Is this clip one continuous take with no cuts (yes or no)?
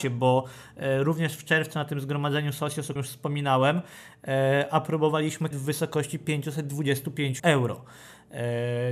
no